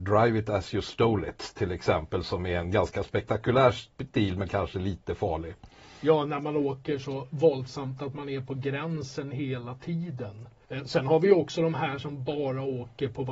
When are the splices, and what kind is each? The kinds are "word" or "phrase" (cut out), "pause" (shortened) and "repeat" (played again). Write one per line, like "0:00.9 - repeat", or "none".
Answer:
none